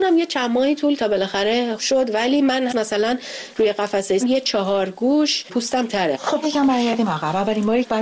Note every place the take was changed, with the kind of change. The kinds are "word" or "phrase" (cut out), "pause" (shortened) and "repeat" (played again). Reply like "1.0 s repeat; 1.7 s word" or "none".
1.0 s word; 1.8 s word; 2.7 s word; 4.2 s word; 5.9 s word; 6.4 s word